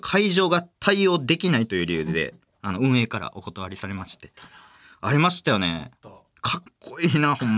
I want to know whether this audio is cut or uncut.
uncut